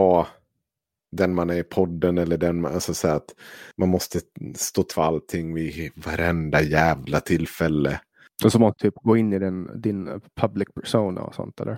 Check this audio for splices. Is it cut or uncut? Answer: cut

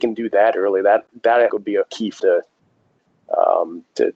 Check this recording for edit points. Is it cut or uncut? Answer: cut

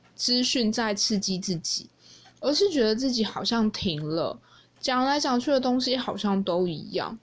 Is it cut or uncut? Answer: uncut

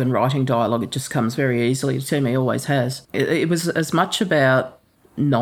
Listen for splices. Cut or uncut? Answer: cut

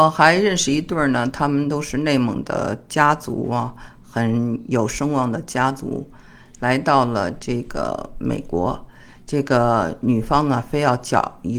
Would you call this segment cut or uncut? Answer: uncut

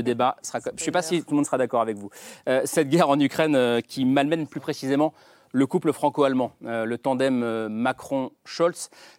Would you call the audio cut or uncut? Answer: uncut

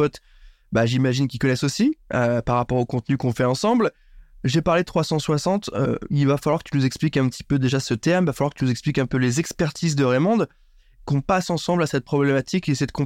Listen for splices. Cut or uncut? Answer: uncut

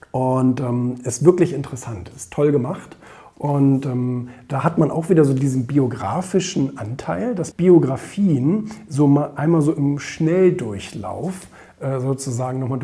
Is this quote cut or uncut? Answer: cut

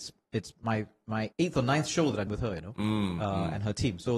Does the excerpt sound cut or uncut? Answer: cut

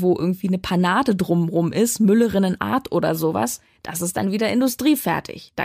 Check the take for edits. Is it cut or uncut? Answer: uncut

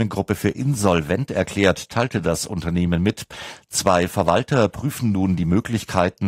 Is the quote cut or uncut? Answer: uncut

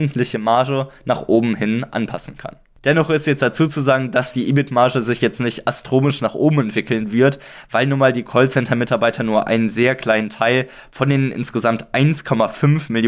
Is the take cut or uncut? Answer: uncut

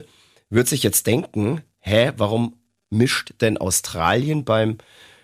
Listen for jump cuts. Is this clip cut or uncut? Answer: uncut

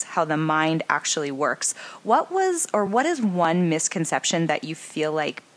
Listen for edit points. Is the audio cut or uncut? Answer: uncut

